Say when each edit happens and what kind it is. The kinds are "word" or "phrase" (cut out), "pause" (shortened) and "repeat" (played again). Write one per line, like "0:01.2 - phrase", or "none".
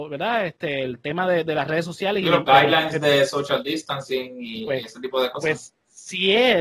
none